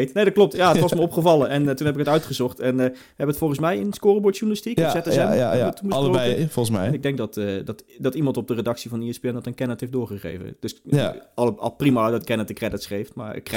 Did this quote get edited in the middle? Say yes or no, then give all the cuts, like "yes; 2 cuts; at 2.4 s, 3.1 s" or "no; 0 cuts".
no; 0 cuts